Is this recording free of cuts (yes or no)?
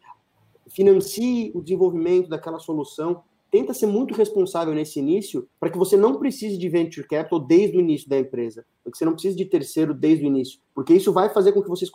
no